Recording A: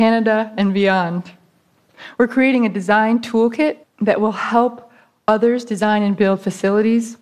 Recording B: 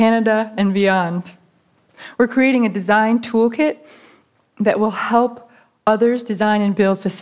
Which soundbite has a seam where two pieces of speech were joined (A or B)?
A